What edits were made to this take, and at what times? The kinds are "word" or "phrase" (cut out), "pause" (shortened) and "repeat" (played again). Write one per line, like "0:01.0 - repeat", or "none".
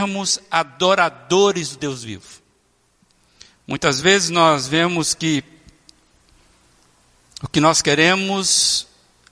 none